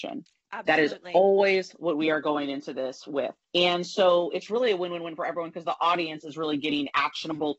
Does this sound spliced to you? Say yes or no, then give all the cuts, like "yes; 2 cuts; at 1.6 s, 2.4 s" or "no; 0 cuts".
yes; 1 cut; at 3.4 s